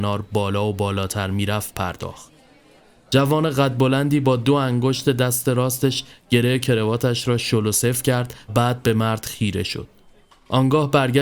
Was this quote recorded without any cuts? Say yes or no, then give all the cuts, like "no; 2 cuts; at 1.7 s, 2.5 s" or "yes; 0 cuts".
no; 1 cut; at 8.5 s